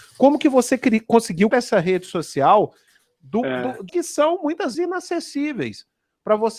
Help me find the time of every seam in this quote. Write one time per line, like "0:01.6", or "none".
0:01.5
0:03.9
0:04.7